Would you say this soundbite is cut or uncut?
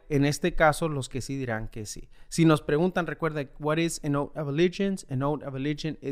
cut